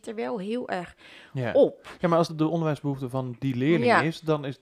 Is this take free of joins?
no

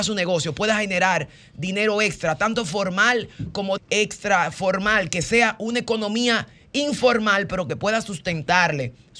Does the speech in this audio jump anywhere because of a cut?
yes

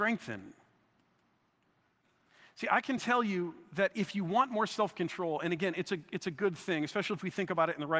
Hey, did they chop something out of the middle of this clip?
no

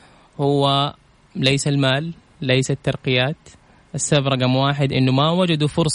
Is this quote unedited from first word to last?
yes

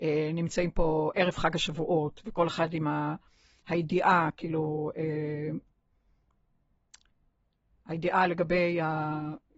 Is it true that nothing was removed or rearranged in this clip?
yes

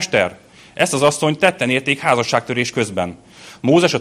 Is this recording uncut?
yes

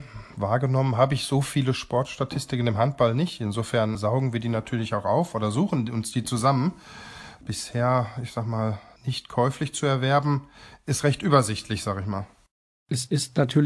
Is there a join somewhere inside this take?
no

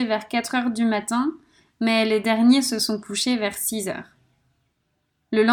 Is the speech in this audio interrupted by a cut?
no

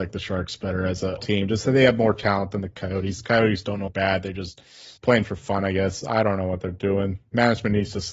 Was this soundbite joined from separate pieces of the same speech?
yes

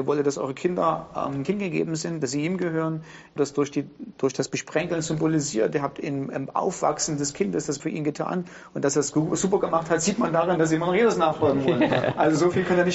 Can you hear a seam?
yes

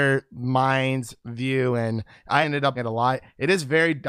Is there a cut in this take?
yes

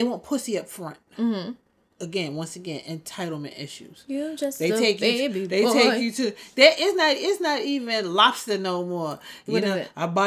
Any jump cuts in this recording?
no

